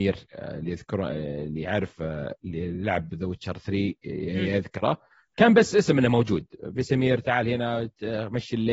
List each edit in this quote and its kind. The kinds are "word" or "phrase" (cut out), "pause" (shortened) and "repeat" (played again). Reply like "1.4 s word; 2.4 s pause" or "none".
none